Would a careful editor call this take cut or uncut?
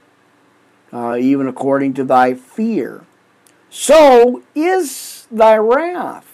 uncut